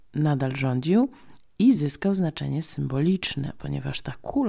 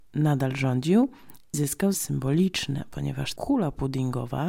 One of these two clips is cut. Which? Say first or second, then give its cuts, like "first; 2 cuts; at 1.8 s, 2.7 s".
second; 3 cuts; at 1.5 s, 1.9 s, 3.4 s